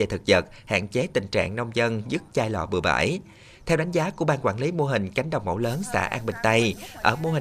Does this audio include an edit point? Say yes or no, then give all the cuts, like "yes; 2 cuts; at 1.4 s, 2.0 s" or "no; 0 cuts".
no; 0 cuts